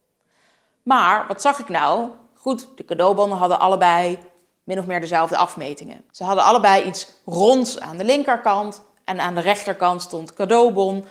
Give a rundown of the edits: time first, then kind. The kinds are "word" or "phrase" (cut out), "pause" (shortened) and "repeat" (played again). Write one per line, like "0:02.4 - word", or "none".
0:06.1 - pause